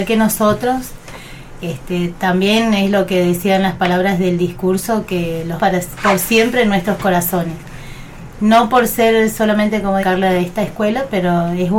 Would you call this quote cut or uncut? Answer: cut